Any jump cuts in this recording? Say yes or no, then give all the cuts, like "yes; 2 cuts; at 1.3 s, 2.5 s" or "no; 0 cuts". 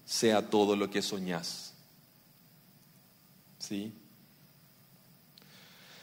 no; 0 cuts